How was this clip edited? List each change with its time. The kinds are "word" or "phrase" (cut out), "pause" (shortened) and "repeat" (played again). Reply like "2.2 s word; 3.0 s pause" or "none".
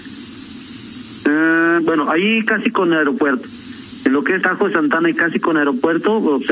4.4 s word